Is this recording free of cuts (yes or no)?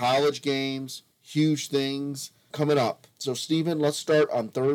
no